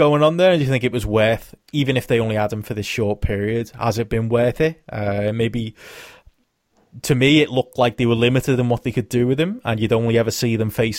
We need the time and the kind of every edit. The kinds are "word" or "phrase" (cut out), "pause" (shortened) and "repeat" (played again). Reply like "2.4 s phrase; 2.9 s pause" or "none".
none